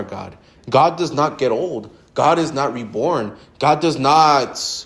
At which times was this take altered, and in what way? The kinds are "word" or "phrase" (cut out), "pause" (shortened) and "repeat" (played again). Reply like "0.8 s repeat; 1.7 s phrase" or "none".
none